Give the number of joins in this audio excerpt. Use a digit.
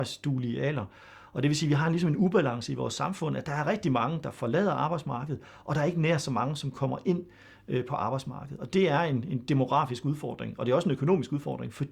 0